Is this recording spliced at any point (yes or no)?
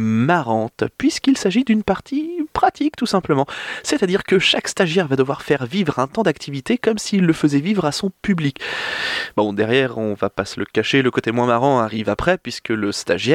no